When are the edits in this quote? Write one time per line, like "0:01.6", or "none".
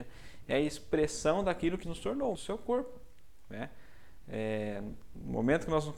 0:01.8
0:02.3